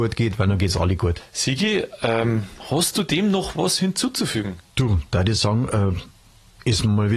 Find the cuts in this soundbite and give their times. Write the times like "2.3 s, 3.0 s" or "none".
4.7 s